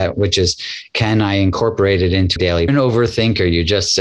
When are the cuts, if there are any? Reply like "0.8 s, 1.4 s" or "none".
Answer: 2.4 s, 2.7 s